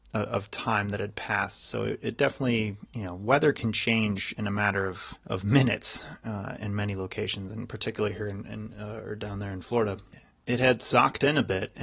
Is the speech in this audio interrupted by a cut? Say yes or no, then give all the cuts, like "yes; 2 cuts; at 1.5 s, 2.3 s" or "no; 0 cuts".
yes; 2 cuts; at 5.2 s, 6.6 s